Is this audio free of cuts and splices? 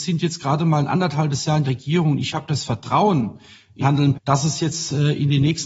no; 3 cuts; at 1.6 s, 3.8 s, 4.1 s

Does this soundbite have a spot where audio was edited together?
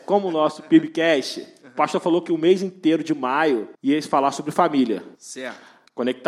yes; 2 cuts; at 3.7 s, 5.1 s

